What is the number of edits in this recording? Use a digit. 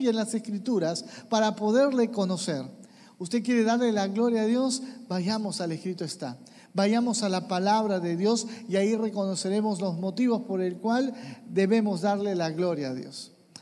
0